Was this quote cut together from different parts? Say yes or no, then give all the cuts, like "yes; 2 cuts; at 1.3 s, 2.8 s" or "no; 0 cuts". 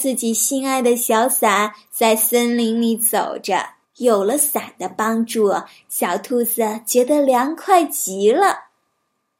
yes; 1 cut; at 3.8 s